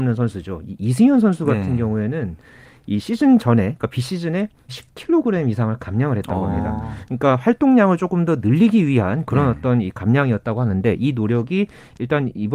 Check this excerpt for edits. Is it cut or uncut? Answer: cut